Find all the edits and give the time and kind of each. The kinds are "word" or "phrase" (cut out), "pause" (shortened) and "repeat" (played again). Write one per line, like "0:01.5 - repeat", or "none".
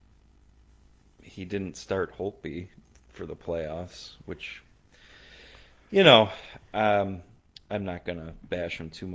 none